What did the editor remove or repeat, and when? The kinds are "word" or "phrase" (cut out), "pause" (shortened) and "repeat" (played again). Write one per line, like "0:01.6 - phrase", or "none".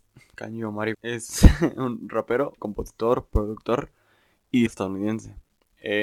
0:00.9 - word
0:02.6 - word
0:04.7 - word